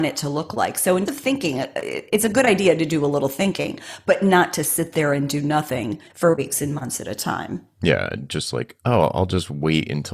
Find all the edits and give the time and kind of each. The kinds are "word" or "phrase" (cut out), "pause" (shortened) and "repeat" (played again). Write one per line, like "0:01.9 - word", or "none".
0:01.1 - word
0:06.1 - pause
0:07.7 - pause